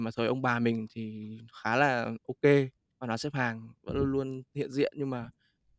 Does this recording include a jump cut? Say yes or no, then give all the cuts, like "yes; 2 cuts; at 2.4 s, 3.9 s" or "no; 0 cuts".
no; 0 cuts